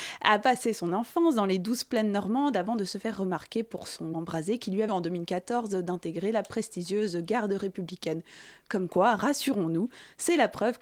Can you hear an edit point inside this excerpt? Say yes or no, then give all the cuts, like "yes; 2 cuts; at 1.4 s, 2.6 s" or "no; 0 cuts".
yes; 2 cuts; at 4.1 s, 4.9 s